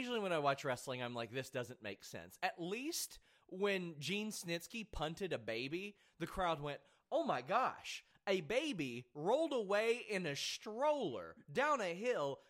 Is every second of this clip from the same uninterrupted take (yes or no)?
yes